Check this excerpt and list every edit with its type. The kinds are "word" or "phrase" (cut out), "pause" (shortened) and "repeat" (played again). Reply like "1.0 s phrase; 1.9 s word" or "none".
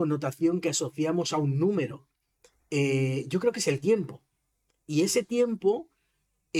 none